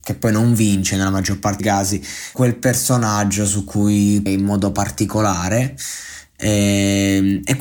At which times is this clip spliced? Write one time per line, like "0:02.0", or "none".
0:01.6
0:02.3
0:04.3